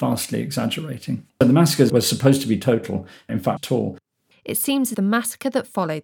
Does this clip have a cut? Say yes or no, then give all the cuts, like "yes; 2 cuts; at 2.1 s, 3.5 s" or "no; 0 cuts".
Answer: yes; 5 cuts; at 1.3 s, 1.9 s, 3.6 s, 4.3 s, 4.9 s